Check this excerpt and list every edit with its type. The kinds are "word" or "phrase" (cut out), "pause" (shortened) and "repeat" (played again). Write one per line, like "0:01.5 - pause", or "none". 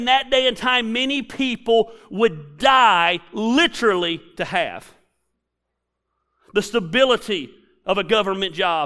none